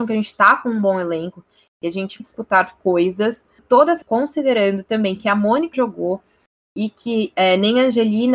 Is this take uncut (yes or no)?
no